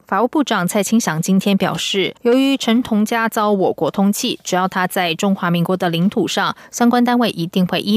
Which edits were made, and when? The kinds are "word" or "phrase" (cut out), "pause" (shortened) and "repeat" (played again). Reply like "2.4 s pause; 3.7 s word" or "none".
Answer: 2.2 s pause